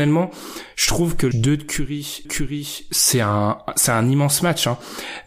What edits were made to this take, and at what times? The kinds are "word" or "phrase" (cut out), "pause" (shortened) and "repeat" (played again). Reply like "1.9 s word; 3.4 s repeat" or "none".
1.3 s word; 2.2 s repeat

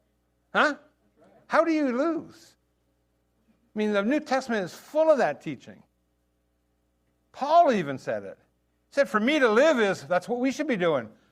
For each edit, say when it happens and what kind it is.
none

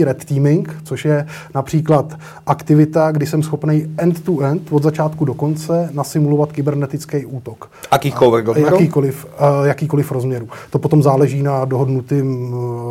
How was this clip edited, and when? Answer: none

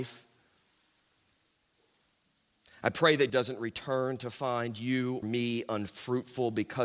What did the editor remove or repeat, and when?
3.3 s word; 5.2 s word

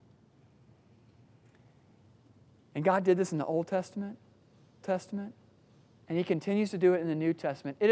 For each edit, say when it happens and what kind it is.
4.8 s repeat

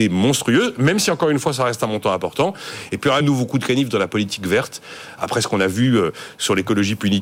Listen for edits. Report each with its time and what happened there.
3.2 s word

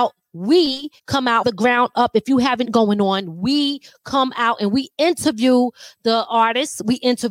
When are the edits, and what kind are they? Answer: 1.0 s pause; 1.4 s word; 2.6 s word

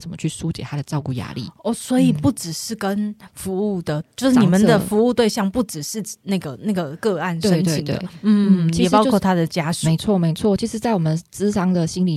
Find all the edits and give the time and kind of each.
4.0 s word

